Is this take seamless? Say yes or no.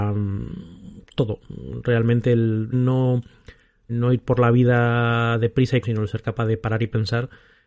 no